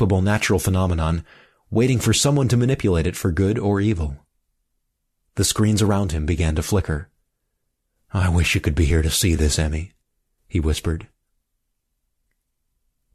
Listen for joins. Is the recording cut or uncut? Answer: uncut